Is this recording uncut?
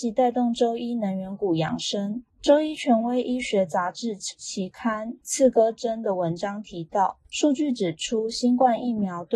no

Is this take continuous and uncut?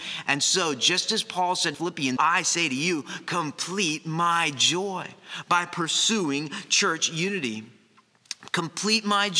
no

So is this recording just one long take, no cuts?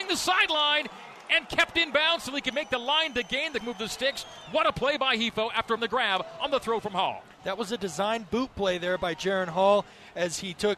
no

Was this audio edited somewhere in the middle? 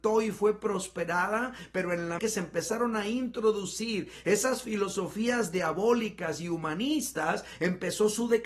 yes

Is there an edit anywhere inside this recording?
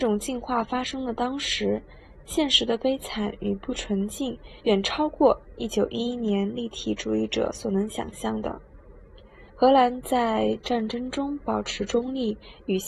yes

